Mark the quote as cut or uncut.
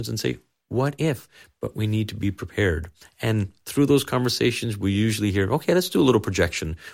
uncut